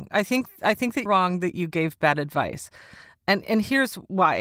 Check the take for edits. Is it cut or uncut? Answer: cut